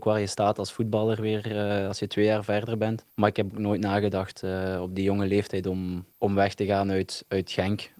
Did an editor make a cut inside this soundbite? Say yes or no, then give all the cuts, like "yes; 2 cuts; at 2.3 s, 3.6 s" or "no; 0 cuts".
yes; 2 cuts; at 3.1 s, 6.1 s